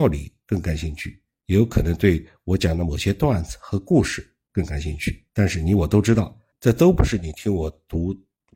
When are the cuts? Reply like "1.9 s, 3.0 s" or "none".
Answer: 5.3 s, 6.5 s